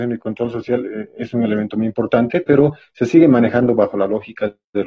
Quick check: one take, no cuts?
yes; 0 cuts

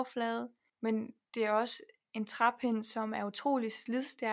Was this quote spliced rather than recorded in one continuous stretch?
no; 0 cuts

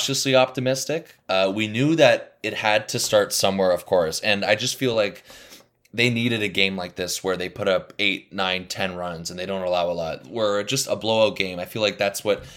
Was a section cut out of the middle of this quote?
no; 0 cuts

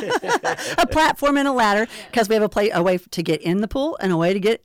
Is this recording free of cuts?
yes; 0 cuts

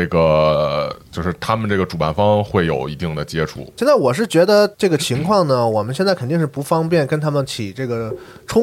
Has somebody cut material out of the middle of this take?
yes; 1 cut; at 4.7 s

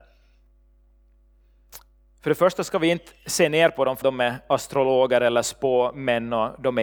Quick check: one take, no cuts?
no; 1 cut; at 4.0 s

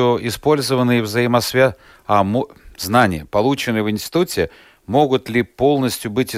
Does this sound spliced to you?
no; 0 cuts

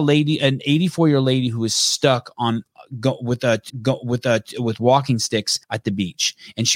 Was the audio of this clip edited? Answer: yes; 2 cuts; at 3.7 s, 5.6 s

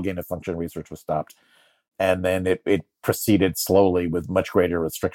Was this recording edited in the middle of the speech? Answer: no; 0 cuts

